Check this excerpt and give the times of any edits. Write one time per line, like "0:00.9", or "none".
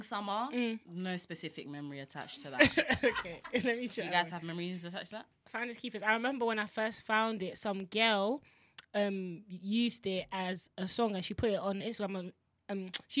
0:11.8